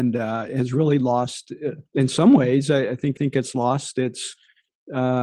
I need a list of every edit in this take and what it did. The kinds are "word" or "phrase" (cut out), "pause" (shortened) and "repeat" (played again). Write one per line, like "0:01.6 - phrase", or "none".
0:01.9 - pause
0:03.1 - repeat